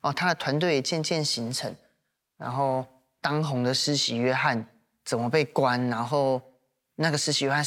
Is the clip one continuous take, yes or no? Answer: yes